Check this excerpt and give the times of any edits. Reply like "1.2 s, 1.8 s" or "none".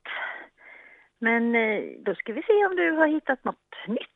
none